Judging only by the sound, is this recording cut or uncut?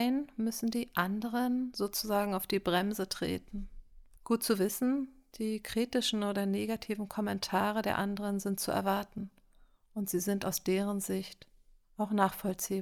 uncut